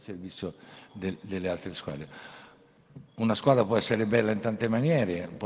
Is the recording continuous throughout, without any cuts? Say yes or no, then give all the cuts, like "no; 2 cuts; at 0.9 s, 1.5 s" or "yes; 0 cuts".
yes; 0 cuts